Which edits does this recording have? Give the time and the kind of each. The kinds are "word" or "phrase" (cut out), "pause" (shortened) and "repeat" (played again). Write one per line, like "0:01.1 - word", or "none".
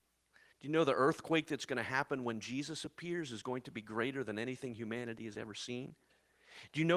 none

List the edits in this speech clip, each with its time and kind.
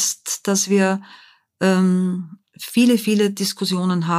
0:02.5 - pause

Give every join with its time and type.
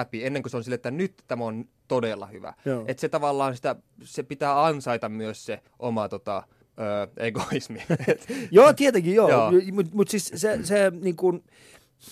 0:05.7 - pause
0:06.6 - pause

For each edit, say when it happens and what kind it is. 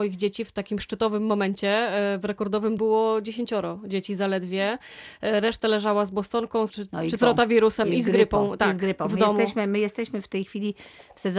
0:02.8 - word
0:06.7 - word
0:07.2 - word

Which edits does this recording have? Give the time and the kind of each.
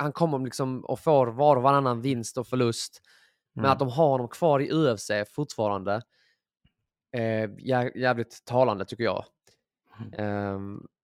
none

